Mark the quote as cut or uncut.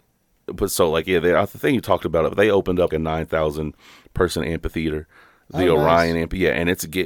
cut